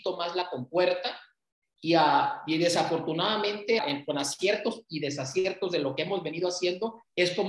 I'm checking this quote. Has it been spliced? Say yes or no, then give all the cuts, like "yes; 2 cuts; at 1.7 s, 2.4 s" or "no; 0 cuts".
yes; 1 cut; at 3.8 s